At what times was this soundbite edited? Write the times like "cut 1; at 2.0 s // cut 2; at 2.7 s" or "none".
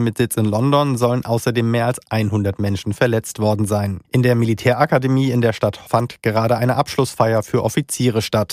cut 1; at 4.0 s // cut 2; at 5.9 s